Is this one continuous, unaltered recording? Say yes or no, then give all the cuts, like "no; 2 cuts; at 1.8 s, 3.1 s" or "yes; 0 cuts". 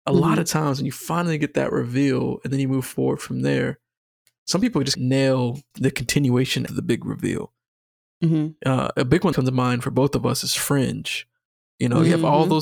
no; 4 cuts; at 4.9 s, 5.7 s, 6.7 s, 9.3 s